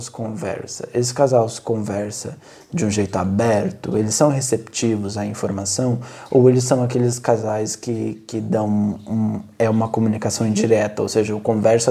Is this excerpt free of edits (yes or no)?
yes